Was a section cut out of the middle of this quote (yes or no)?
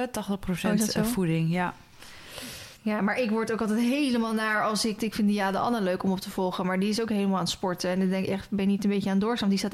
yes